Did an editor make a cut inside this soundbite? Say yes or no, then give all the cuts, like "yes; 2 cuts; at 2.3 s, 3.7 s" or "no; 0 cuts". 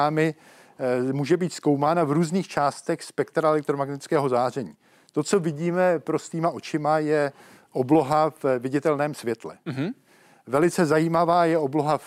no; 0 cuts